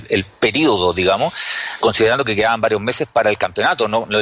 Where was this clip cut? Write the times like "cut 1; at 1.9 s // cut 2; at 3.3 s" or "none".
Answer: cut 1; at 1.8 s